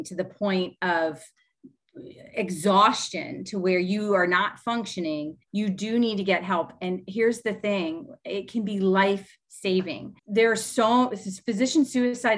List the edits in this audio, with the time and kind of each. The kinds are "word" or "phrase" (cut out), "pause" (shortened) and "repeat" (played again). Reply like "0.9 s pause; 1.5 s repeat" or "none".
5.4 s pause; 10.2 s pause